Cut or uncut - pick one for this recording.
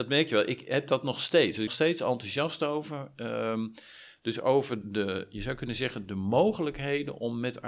cut